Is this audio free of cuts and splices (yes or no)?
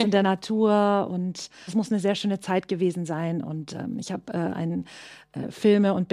no